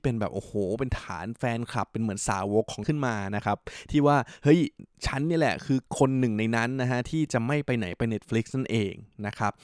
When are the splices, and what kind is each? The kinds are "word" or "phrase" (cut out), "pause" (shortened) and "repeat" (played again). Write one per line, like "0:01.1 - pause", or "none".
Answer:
0:02.8 - word
0:05.9 - pause

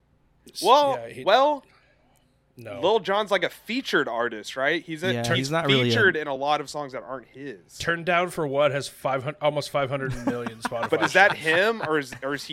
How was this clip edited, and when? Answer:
none

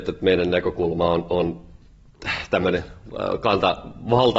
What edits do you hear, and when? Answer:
none

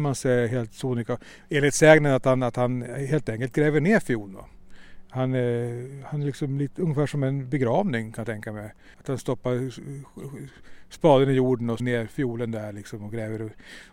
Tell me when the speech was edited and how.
0:08.9 - pause
0:11.8 - phrase

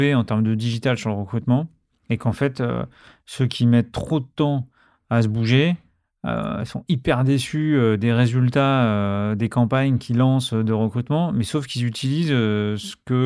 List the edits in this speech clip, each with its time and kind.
none

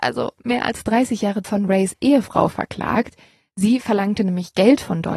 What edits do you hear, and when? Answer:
0:01.4 - word

